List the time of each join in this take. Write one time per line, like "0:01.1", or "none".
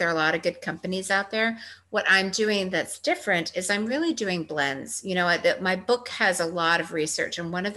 none